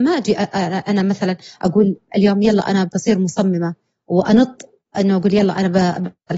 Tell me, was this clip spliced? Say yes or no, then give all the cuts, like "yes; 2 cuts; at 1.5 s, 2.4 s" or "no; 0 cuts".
no; 0 cuts